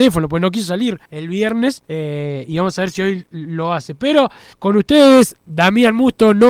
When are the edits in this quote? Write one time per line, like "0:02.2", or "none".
0:01.1
0:01.8
0:04.5